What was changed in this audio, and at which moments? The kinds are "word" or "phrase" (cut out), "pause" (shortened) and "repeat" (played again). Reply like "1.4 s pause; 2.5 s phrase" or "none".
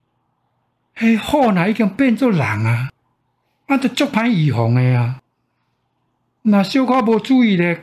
none